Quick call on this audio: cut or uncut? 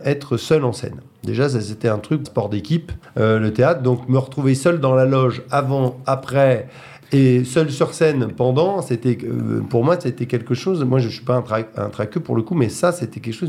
cut